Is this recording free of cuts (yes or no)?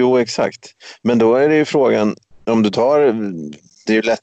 yes